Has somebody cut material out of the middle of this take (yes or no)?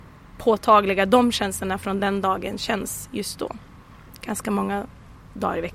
no